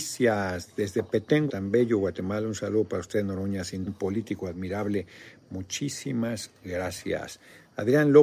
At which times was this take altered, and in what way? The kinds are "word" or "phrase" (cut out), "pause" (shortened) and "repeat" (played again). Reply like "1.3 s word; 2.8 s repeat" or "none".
1.5 s word; 3.9 s word